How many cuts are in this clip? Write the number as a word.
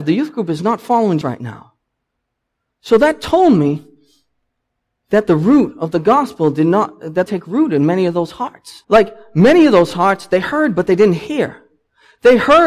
three